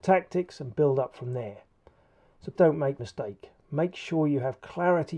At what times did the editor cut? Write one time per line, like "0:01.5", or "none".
0:02.6
0:03.0